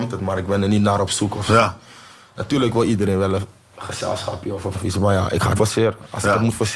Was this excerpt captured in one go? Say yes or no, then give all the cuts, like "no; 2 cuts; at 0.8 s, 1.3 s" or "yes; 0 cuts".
no; 2 cuts; at 4.7 s, 5.6 s